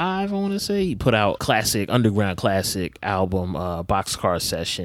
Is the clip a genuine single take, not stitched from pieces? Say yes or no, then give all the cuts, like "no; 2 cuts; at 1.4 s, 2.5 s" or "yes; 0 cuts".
no; 1 cut; at 1.4 s